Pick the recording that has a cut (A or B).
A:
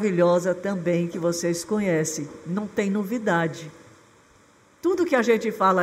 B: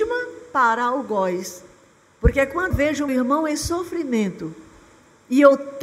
B